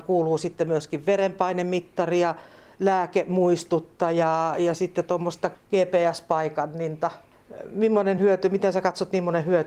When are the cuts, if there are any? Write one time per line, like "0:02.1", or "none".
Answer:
none